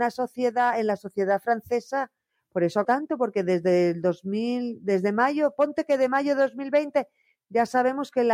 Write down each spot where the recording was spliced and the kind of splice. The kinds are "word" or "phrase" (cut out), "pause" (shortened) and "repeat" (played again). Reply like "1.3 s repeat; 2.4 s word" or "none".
2.8 s word